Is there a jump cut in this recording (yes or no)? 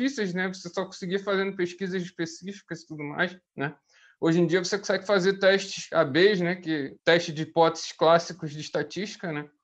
yes